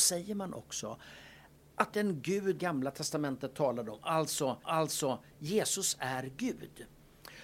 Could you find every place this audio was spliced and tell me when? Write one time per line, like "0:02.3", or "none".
0:01.9
0:02.6
0:04.6